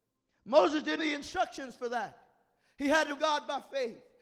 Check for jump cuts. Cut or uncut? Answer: cut